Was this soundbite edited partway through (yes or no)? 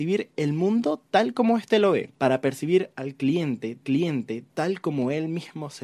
yes